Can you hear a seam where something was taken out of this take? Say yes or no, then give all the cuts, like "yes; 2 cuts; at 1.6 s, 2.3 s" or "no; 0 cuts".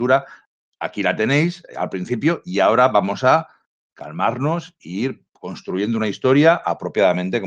no; 0 cuts